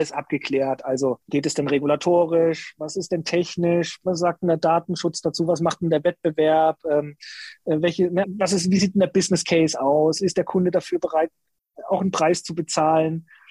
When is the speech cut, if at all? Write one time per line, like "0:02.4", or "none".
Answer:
0:01.2
0:08.2